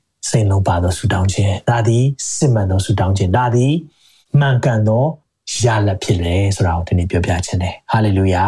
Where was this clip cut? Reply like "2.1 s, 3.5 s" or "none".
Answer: none

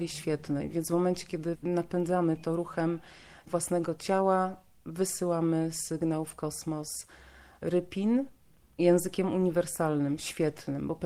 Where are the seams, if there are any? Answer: none

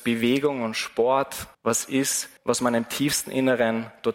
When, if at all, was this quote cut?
1.5 s, 2.4 s

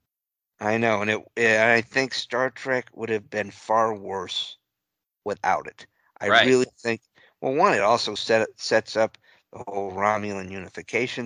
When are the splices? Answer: none

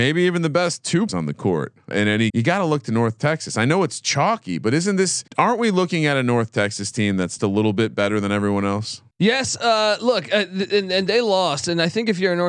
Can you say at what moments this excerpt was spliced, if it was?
1.1 s, 1.9 s, 2.3 s, 5.3 s, 7.4 s, 9.1 s

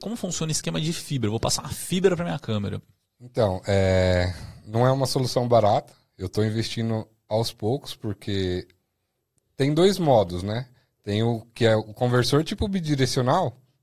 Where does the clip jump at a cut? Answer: none

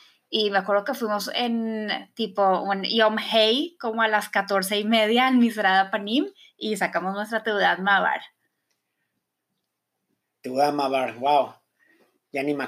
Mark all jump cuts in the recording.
none

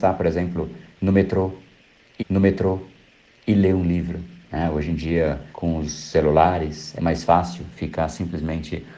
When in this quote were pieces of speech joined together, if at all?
2.2 s, 5.5 s, 7.0 s

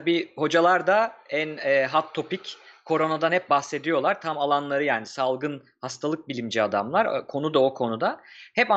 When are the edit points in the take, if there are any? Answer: none

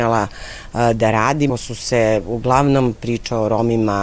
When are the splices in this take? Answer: 1.5 s, 2.9 s

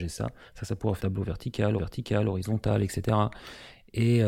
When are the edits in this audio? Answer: 1.0 s, 1.8 s

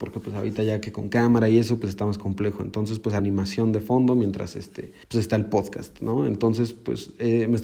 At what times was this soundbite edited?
3.2 s, 5.0 s

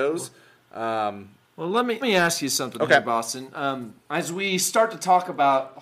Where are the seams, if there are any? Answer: 1.4 s, 2.0 s, 4.0 s

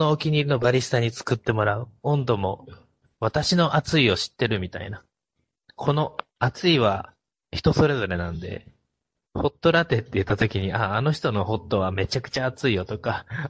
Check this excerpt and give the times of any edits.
none

